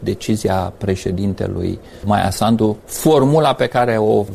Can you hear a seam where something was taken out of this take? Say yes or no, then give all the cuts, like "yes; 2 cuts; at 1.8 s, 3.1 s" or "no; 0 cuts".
yes; 1 cut; at 2.8 s